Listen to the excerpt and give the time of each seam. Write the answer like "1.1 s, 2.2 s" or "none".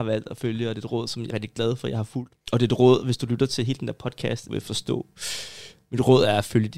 1.3 s, 2.4 s, 4.5 s